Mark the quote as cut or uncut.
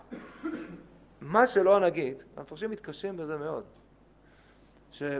uncut